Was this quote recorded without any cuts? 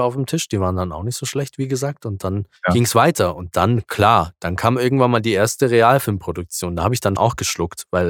no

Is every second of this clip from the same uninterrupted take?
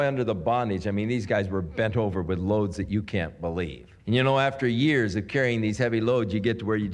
no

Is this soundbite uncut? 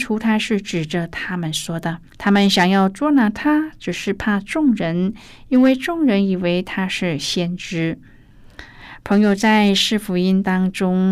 no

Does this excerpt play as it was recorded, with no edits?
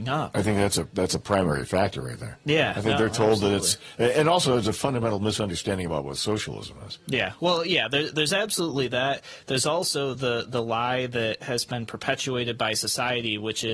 yes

